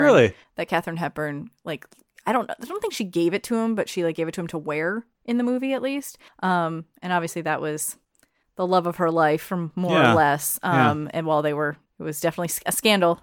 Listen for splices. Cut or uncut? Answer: uncut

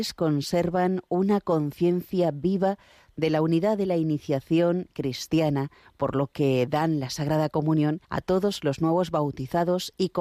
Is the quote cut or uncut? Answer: cut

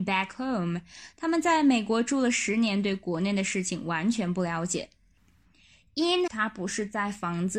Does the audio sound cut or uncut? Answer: cut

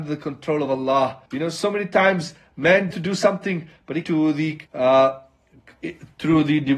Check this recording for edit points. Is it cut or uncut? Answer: cut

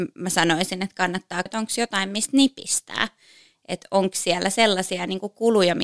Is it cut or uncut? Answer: cut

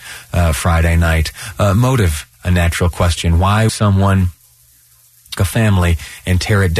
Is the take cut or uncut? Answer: cut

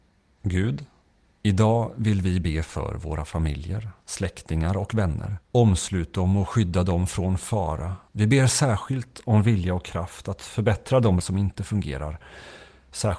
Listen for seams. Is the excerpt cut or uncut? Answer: cut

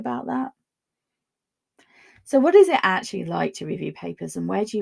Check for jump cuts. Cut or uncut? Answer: uncut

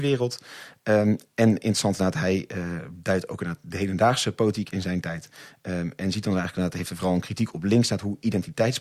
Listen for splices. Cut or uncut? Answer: uncut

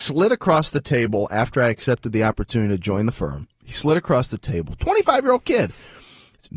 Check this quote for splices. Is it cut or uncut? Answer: cut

